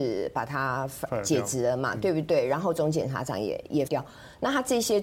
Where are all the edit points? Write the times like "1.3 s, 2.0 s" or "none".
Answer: 3.9 s